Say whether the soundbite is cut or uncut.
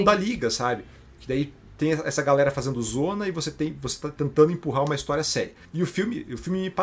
uncut